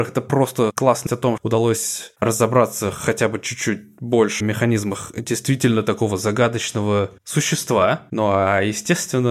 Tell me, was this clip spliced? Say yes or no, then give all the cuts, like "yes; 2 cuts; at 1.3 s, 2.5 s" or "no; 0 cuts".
yes; 3 cuts; at 1.1 s, 1.4 s, 4.4 s